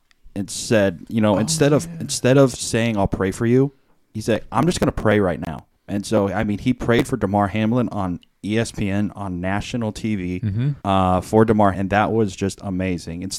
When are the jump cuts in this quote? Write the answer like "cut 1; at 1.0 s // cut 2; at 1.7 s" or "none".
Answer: cut 1; at 3.9 s // cut 2; at 5.7 s // cut 3; at 10.8 s // cut 4; at 11.7 s